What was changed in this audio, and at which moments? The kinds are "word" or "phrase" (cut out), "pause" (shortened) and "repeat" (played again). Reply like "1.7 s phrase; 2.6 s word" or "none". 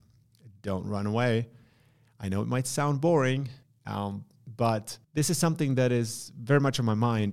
3.6 s pause; 5.0 s pause